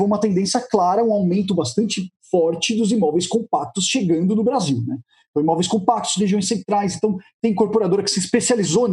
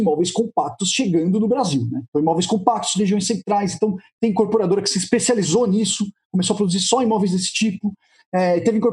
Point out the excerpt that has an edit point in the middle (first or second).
second